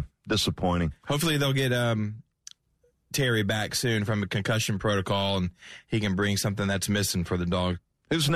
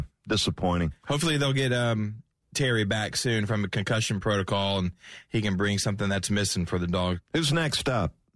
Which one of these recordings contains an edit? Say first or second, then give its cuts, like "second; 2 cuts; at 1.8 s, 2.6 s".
second; 2 cuts; at 2.4 s, 7.2 s